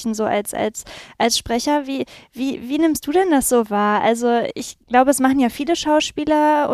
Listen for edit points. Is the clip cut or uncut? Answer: cut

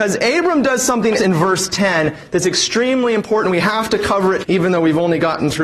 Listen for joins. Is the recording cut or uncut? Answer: cut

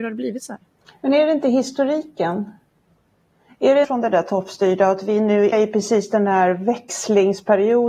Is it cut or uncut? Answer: cut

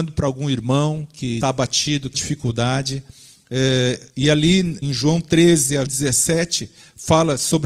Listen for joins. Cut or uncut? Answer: cut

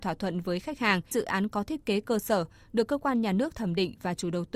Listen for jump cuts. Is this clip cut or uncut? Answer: cut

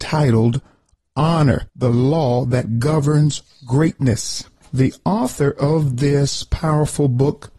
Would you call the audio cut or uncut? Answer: cut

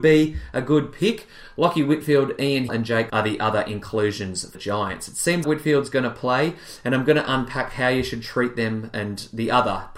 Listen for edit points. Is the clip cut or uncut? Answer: cut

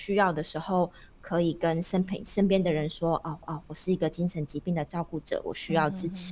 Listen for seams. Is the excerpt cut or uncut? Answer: cut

